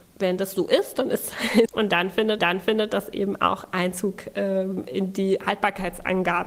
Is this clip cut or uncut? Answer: cut